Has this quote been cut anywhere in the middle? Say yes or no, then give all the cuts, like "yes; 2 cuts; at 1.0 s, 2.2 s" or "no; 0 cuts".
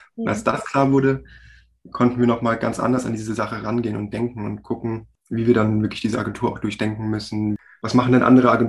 no; 0 cuts